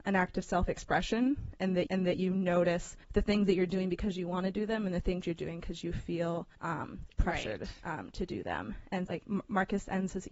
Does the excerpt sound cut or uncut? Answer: cut